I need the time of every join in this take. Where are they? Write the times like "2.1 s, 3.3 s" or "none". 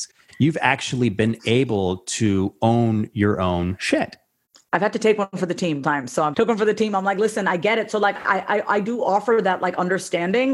5.8 s, 6.3 s